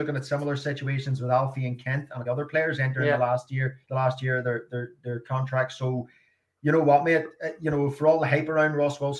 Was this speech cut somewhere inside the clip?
yes; 2 cuts; at 2.2 s, 3.8 s

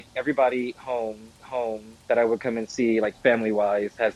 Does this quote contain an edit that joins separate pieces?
yes; 1 cut; at 1.4 s

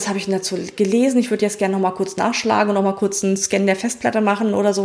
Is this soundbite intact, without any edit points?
yes; 0 cuts

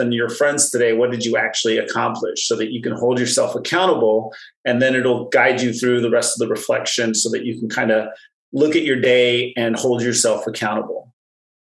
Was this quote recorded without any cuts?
yes; 0 cuts

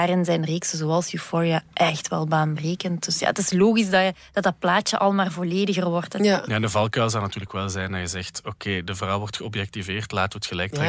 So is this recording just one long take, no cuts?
yes; 0 cuts

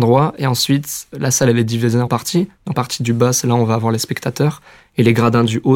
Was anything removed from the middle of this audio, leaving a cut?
yes; 2 cuts; at 2.1 s, 2.7 s

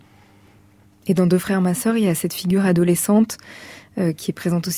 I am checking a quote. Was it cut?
no; 0 cuts

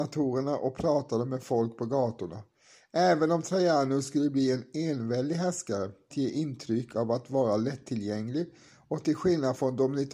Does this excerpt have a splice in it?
yes; 1 cut; at 6.1 s

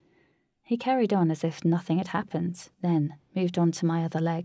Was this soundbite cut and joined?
yes; 1 cut; at 2.7 s

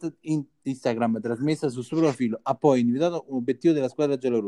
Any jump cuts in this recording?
no; 0 cuts

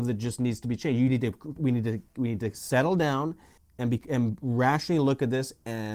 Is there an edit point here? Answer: no; 0 cuts

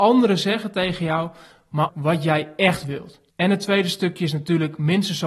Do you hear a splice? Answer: yes; 2 cuts; at 1.9 s, 3.3 s

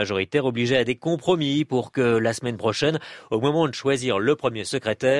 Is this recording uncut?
yes; 0 cuts

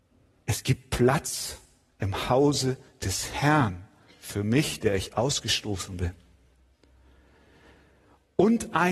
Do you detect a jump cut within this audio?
no; 0 cuts

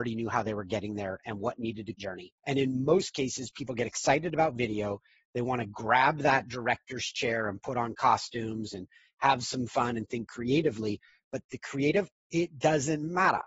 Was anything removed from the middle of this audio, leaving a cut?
yes; 2 cuts; at 1.9 s, 2.4 s

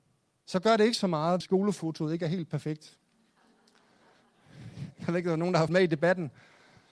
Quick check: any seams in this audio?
yes; 2 cuts; at 1.4 s, 5.7 s

